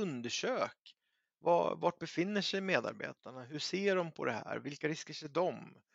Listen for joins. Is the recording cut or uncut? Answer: uncut